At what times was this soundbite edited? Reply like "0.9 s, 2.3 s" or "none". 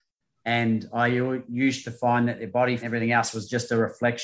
2.8 s